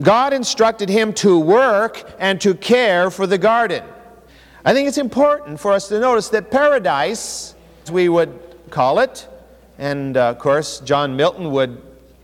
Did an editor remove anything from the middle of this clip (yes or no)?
yes